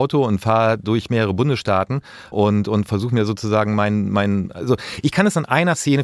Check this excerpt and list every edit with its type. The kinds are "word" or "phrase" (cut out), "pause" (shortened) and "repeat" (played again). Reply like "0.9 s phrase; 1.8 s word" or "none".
2.3 s word